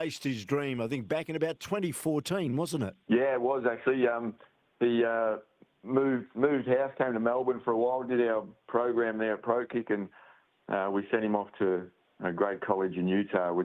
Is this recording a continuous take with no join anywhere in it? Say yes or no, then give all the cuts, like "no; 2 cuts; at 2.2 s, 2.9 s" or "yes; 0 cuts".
yes; 0 cuts